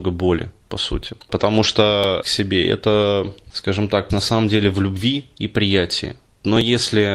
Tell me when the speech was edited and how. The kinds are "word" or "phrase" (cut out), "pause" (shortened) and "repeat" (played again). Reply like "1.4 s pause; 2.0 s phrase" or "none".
2.2 s word; 4.1 s word